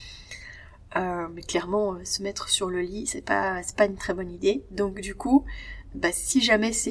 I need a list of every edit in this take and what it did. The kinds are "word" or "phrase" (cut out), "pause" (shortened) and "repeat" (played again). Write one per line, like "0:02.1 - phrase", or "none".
0:05.9 - word